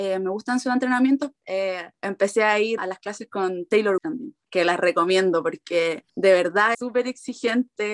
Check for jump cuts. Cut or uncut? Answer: cut